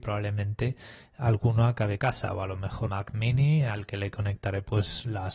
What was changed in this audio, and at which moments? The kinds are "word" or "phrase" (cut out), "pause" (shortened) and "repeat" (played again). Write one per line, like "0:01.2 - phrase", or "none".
0:02.0 - phrase
0:02.9 - word